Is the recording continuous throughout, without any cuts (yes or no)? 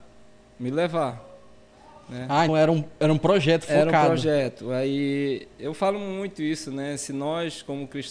no